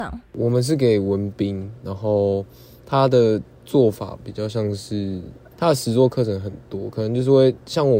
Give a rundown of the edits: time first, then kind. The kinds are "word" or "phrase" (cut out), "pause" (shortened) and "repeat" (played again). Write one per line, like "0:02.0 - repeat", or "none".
none